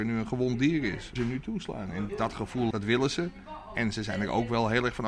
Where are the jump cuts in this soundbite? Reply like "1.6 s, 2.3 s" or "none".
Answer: 1.2 s, 2.1 s, 2.7 s

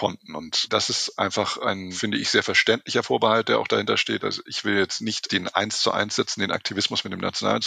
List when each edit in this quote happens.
none

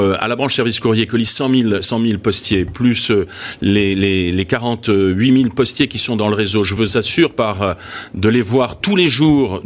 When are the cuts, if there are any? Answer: none

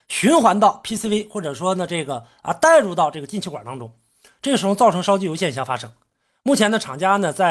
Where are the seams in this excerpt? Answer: none

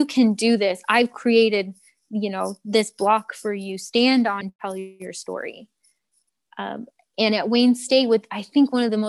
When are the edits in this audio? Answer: 4.4 s

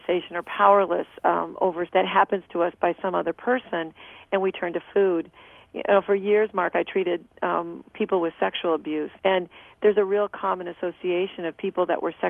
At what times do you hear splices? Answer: 1.9 s, 9.2 s

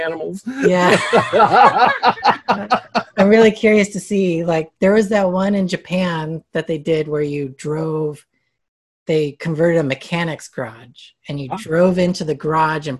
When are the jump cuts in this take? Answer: none

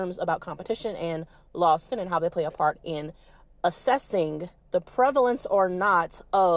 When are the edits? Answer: 1.9 s, 4.6 s

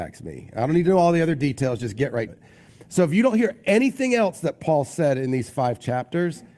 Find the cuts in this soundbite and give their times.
2.3 s

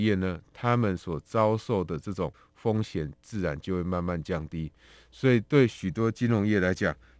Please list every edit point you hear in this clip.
none

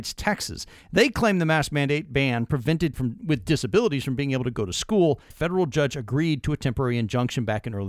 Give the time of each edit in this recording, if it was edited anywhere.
2.9 s, 5.3 s

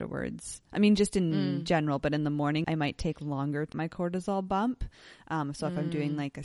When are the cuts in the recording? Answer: 2.6 s, 3.7 s

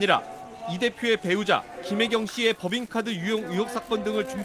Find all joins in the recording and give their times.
none

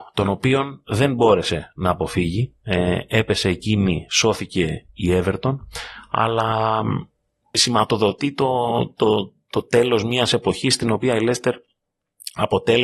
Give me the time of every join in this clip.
none

